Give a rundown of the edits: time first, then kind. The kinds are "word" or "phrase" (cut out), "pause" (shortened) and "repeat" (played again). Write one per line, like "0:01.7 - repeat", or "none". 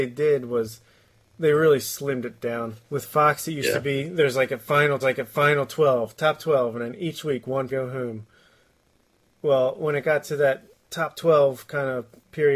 0:02.8 - pause
0:05.0 - repeat
0:07.7 - phrase